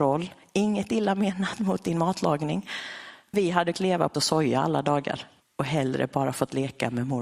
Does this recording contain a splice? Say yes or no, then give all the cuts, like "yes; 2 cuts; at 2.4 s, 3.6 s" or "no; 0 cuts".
yes; 4 cuts; at 3.3 s, 3.7 s, 4.1 s, 5.4 s